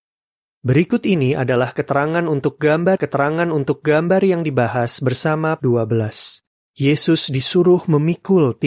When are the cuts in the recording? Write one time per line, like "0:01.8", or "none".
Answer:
0:03.0
0:05.6
0:06.6